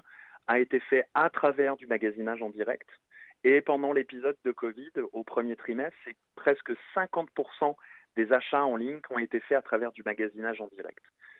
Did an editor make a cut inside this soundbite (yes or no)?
no